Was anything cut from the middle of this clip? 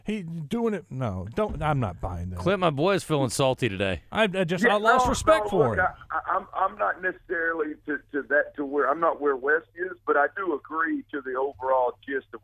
yes; 1 cut; at 6.1 s

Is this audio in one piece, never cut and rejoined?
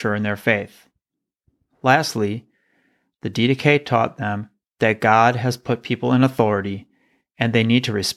yes; 0 cuts

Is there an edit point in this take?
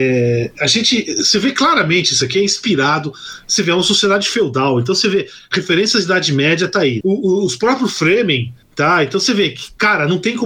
yes; 1 cut; at 7.0 s

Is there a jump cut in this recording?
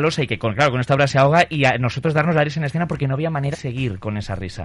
yes; 1 cut; at 3.5 s

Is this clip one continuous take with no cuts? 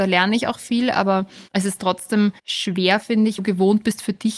no; 3 cuts; at 1.5 s, 2.4 s, 3.4 s

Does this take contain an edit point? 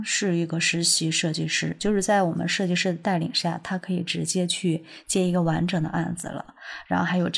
no; 0 cuts

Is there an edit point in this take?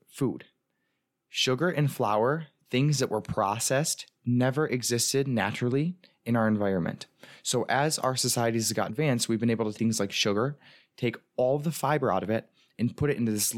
yes; 2 cuts; at 8.9 s, 9.8 s

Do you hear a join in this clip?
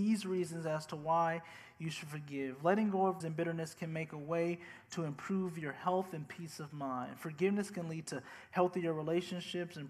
yes; 1 cut; at 3.2 s

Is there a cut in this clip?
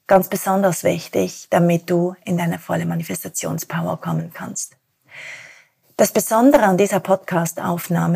no; 0 cuts

